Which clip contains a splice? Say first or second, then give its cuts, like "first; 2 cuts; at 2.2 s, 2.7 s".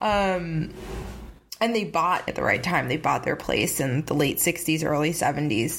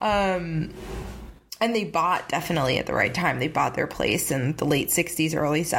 first; 1 cut; at 2.3 s